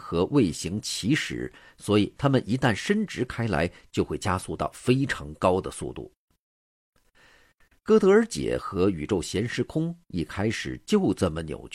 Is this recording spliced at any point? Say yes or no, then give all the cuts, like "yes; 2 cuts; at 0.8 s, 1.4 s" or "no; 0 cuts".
no; 0 cuts